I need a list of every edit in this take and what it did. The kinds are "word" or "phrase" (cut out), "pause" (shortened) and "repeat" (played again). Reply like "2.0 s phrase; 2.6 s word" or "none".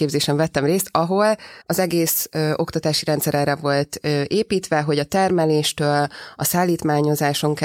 1.6 s pause

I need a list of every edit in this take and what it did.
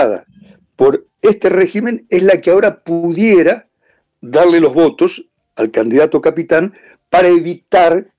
none

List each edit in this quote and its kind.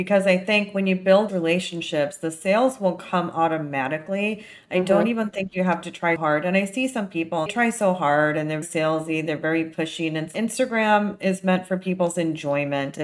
1.3 s word; 6.2 s word; 7.5 s word; 8.6 s word

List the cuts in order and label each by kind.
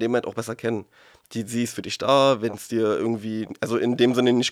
none

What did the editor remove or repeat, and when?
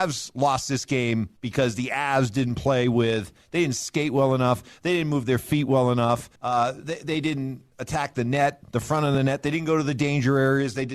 1.4 s pause; 6.4 s pause

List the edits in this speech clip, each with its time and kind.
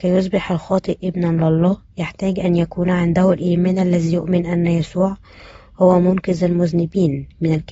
none

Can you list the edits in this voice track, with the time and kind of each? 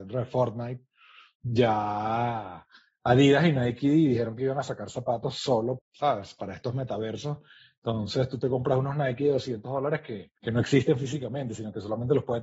5.8 s word; 10.4 s pause

